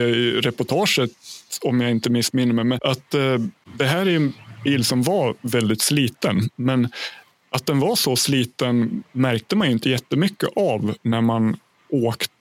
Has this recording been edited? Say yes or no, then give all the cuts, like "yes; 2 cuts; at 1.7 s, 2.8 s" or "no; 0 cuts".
no; 0 cuts